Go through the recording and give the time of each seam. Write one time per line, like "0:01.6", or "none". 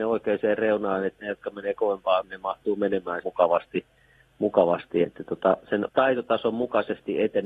0:01.2
0:02.2
0:03.2
0:05.0
0:05.9

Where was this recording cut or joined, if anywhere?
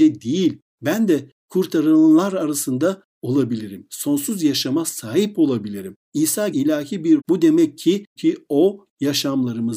0:06.5
0:07.2
0:08.2

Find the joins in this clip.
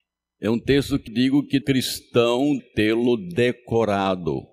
0:01.1
0:01.6
0:02.6

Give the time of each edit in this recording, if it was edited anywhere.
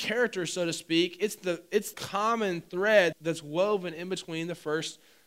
0:01.9
0:03.1

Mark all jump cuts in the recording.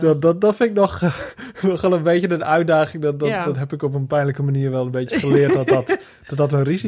none

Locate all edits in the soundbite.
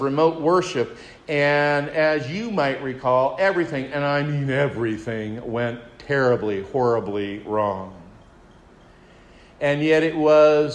none

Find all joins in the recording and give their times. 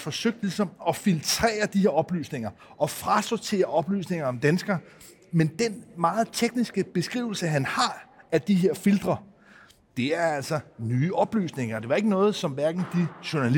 none

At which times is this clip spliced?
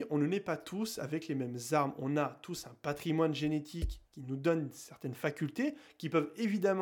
0:04.1

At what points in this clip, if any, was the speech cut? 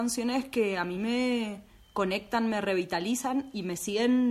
none

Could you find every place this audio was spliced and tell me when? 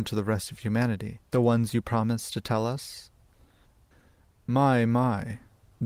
0:01.3

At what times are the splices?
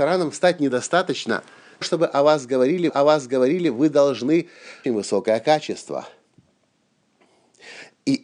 0:01.8
0:02.9
0:04.8

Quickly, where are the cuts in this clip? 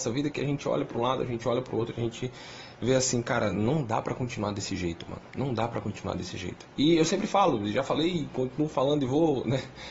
0:05.3
0:06.7

